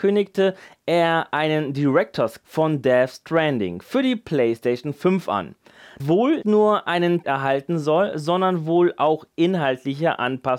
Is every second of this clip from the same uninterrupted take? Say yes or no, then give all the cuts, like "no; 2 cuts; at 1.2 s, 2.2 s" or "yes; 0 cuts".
no; 4 cuts; at 2.4 s, 6.0 s, 6.4 s, 7.2 s